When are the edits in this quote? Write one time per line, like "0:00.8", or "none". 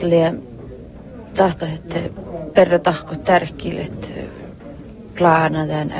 0:01.6